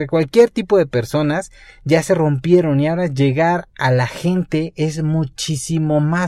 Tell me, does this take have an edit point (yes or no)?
no